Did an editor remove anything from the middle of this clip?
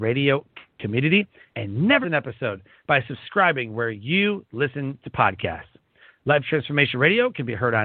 yes; 1 cut; at 2.0 s

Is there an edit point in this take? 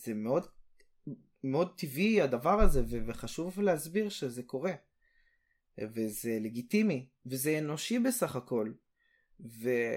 no; 0 cuts

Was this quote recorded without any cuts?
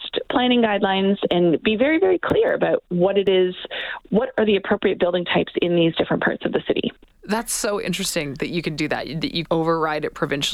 no; 1 cut; at 9.4 s

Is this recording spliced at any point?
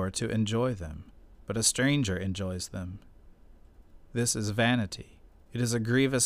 no; 0 cuts

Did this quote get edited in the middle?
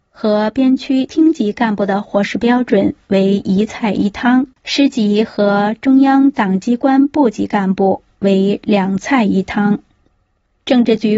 yes; 1 cut; at 4.5 s

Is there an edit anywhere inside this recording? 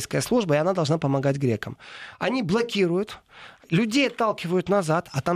no; 0 cuts

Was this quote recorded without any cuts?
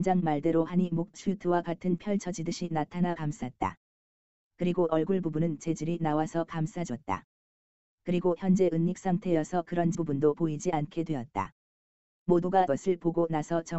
no; 9 cuts; at 1.1 s, 2.0 s, 3.1 s, 4.9 s, 5.6 s, 8.4 s, 9.9 s, 10.3 s, 12.7 s

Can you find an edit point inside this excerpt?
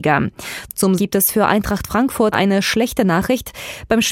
yes; 2 cuts; at 1.0 s, 2.3 s

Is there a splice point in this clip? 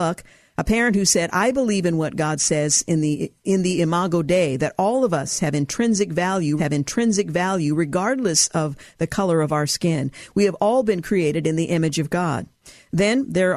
yes; 2 cuts; at 3.4 s, 6.6 s

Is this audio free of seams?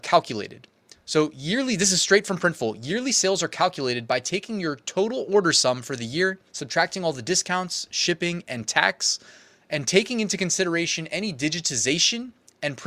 no; 1 cut; at 6.5 s

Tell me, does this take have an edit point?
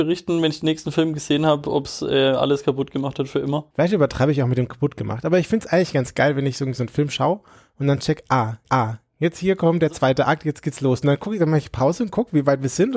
yes; 2 cuts; at 3.7 s, 8.6 s

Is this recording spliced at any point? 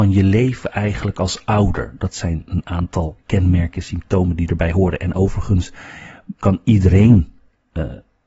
yes; 1 cut; at 6.3 s

